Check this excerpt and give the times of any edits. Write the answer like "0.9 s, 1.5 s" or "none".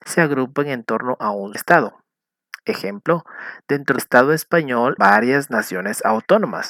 1.5 s, 4.0 s, 5.0 s

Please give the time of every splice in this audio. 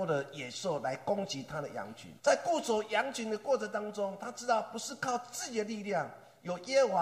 2.2 s

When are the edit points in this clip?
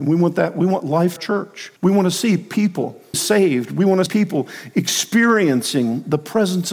1.2 s, 1.8 s, 3.1 s, 4.1 s

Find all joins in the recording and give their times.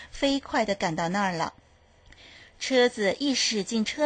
none

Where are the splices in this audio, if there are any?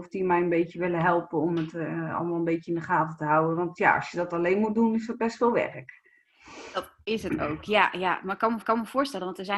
8.6 s

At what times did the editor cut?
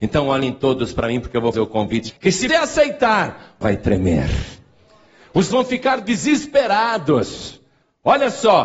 1.5 s, 2.1 s, 2.5 s, 3.6 s, 5.5 s

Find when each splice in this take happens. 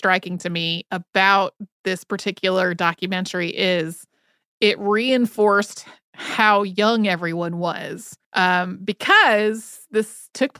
8.2 s

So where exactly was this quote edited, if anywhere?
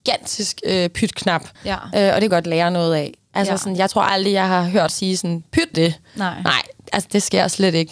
1.5 s, 2.3 s, 4.9 s, 5.7 s

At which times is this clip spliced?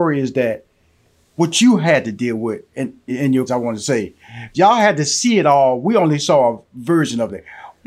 3.1 s, 3.5 s, 4.5 s

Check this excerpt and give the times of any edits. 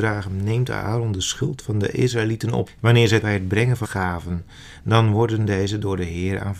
2.7 s, 3.2 s, 3.8 s

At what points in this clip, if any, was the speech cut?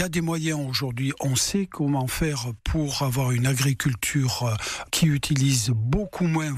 none

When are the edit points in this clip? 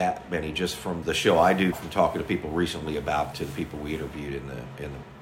1.0 s, 1.7 s, 3.3 s

